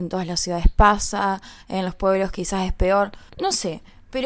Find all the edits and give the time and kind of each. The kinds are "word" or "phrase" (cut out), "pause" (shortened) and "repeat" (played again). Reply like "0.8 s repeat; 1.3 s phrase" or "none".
3.3 s pause